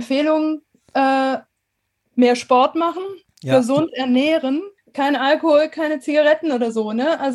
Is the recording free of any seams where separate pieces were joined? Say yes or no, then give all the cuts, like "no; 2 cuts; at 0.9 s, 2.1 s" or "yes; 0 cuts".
no; 1 cut; at 4.8 s